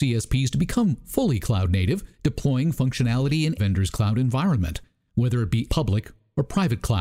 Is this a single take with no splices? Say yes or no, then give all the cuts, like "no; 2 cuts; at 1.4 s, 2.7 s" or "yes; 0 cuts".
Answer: no; 3 cuts; at 2.1 s, 3.6 s, 5.7 s